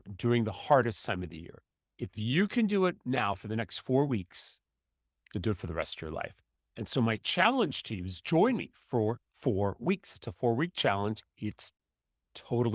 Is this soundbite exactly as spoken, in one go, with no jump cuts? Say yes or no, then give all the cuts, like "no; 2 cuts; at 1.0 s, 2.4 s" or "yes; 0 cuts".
yes; 0 cuts